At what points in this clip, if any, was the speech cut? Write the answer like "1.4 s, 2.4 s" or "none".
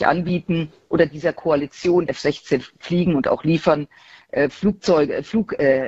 2.1 s